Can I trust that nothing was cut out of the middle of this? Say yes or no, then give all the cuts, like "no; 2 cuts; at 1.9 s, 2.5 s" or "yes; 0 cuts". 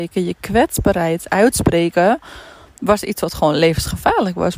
yes; 0 cuts